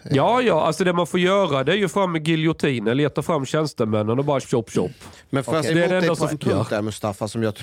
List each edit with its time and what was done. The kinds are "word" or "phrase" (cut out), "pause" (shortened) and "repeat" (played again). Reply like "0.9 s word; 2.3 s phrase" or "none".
4.4 s word; 5.7 s word; 6.3 s word

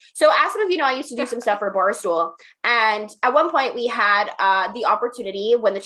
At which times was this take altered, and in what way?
none

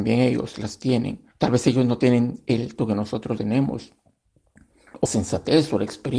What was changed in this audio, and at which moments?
1.3 s pause; 2.8 s word; 3.4 s word; 5.1 s word

